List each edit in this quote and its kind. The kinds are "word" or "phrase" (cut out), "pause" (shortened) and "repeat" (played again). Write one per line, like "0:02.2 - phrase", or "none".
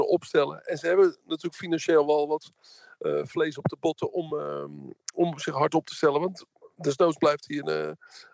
none